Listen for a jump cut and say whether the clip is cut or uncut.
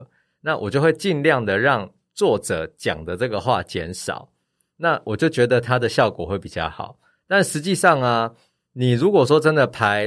uncut